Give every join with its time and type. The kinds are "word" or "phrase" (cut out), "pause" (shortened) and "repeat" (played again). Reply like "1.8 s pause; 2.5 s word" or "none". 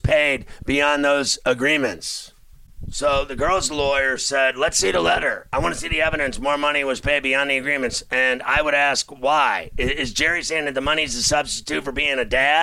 none